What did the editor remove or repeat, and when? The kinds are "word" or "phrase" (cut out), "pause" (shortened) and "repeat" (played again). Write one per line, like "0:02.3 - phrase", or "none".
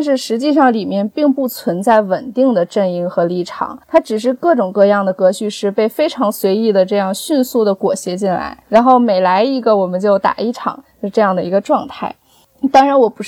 0:03.8 - pause
0:08.6 - pause